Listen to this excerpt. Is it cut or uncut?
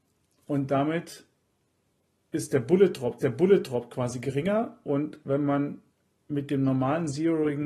cut